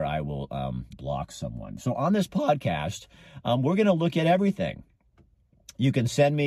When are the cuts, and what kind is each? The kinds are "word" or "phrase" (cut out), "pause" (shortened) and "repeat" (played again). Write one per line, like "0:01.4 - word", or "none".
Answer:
0:00.9 - word